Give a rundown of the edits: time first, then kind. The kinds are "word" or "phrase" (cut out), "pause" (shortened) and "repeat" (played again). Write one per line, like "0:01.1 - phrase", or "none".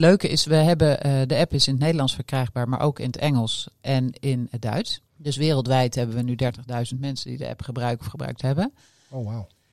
0:05.1 - pause